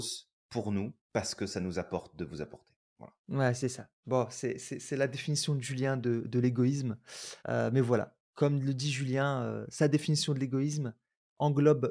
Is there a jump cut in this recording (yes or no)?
yes